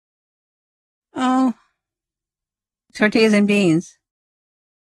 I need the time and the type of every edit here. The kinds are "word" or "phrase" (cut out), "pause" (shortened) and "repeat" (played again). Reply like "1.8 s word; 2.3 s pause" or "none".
none